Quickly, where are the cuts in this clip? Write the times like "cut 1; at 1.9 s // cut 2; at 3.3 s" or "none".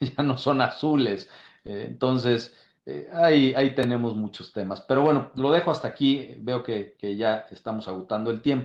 none